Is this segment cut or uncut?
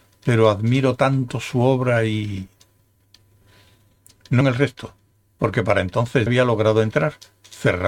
cut